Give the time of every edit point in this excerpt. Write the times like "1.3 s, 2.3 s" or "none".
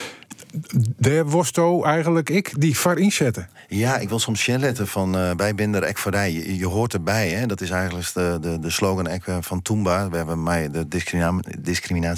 none